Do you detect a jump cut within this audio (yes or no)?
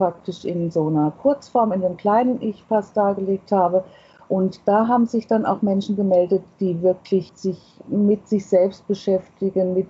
no